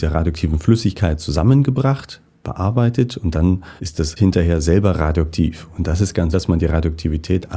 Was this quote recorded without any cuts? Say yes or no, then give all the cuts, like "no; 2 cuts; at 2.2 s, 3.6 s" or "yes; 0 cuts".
no; 3 cuts; at 3.8 s, 4.2 s, 6.3 s